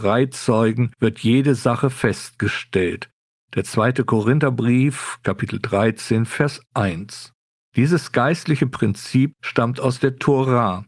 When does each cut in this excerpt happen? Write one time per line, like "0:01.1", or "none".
none